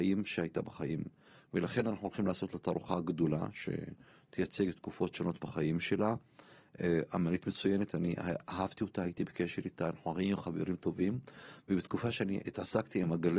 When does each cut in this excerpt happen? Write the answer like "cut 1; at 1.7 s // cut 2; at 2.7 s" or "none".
none